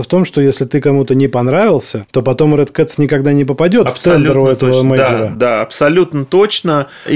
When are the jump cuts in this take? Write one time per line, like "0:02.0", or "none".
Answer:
none